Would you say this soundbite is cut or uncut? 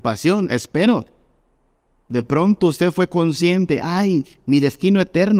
uncut